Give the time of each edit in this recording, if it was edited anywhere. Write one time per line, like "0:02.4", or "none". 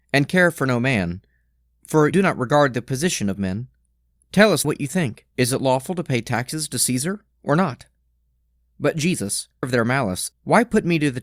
0:02.1
0:04.6
0:05.3
0:09.6
0:10.3